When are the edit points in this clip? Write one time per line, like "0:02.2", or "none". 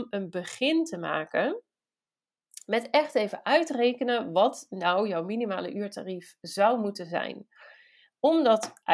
none